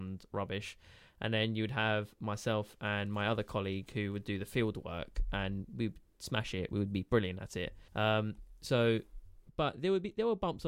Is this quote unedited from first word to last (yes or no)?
no